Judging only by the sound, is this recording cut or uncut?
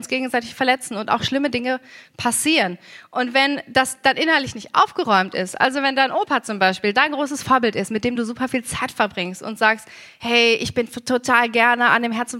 uncut